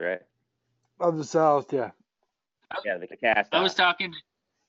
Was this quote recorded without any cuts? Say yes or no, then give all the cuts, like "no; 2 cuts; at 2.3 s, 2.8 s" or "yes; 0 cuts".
no; 1 cut; at 3.1 s